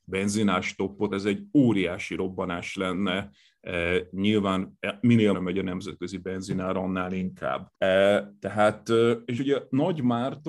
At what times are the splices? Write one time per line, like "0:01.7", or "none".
0:01.1
0:05.3
0:07.7
0:09.4